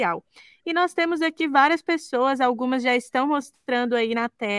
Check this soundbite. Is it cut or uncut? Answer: uncut